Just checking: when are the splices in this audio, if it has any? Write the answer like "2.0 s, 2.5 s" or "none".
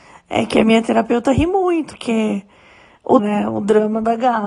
1.9 s, 3.2 s